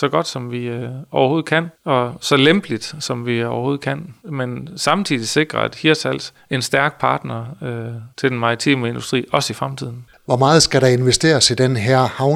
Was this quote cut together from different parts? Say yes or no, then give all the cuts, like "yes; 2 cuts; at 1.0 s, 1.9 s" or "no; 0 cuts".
yes; 3 cuts; at 4.2 s, 6.4 s, 8.1 s